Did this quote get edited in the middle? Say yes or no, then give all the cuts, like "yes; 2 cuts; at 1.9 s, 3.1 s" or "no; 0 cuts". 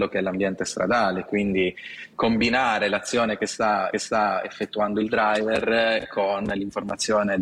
yes; 1 cut; at 3.9 s